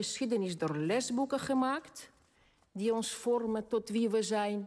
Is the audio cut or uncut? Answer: uncut